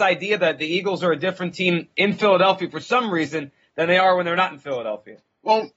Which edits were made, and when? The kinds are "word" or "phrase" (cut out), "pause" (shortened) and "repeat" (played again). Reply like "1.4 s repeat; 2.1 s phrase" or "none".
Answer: none